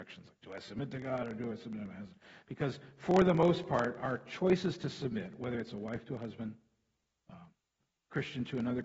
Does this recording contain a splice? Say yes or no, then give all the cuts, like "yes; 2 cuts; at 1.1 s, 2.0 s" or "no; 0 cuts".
no; 0 cuts